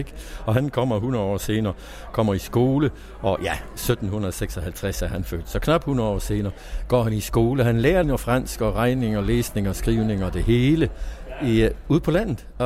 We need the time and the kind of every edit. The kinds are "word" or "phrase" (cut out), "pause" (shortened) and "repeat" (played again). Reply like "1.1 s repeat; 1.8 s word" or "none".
8.0 s word